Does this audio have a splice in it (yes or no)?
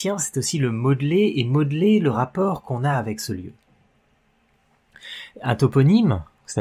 no